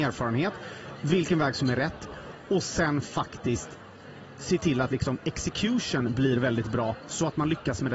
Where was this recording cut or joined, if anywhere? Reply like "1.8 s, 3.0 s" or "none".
none